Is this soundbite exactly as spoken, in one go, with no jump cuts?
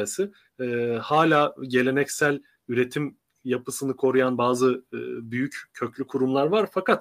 yes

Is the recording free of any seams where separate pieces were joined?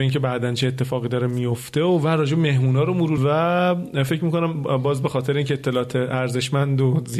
no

